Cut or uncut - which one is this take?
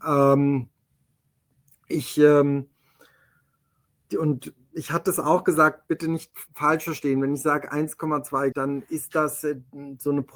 cut